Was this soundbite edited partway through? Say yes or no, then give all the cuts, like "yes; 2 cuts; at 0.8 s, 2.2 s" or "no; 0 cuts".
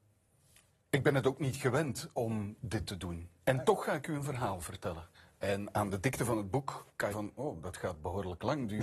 yes; 2 cuts; at 5.1 s, 7.1 s